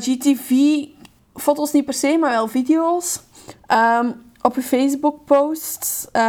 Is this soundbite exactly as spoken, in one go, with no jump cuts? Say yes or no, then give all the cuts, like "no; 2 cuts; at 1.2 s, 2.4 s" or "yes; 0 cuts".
yes; 0 cuts